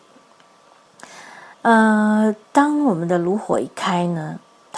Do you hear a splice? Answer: yes; 1 cut; at 1.5 s

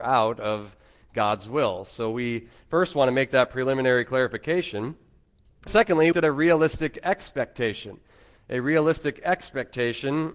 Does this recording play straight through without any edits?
no; 2 cuts; at 5.7 s, 6.1 s

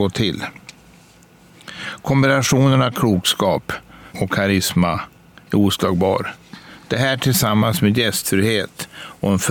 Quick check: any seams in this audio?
yes; 1 cut; at 4.1 s

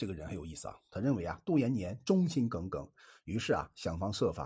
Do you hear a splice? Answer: no; 0 cuts

